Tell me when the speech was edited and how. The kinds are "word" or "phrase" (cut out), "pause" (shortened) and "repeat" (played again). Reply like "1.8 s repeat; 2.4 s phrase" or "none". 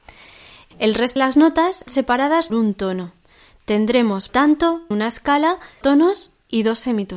1.2 s word; 1.9 s word; 2.5 s word; 4.3 s word; 4.9 s word; 5.8 s word